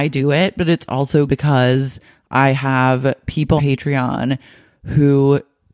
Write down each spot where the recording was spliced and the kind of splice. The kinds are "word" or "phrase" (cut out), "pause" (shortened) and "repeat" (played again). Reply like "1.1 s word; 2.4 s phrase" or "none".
1.3 s word; 3.6 s word